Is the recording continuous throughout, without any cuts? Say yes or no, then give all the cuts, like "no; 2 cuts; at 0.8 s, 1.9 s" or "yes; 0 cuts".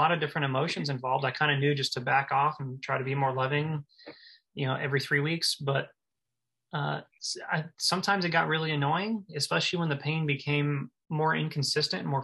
yes; 0 cuts